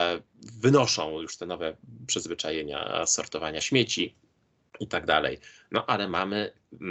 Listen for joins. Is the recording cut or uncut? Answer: uncut